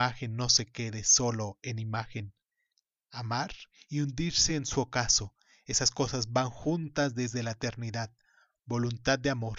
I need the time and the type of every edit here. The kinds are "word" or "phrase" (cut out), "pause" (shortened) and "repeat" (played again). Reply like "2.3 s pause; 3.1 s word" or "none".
none